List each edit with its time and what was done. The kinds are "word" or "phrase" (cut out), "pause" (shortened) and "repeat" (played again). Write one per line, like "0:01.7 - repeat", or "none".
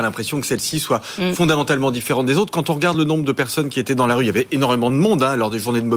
none